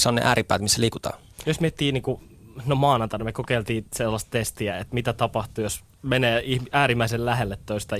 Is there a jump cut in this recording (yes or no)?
no